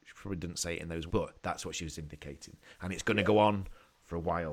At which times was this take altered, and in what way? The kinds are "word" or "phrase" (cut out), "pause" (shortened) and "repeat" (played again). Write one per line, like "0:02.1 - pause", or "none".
0:01.1 - word